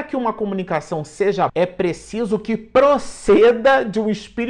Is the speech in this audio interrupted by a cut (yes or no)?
yes